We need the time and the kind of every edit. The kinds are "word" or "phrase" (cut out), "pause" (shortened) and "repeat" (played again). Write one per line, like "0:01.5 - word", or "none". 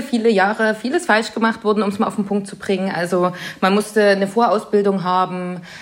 none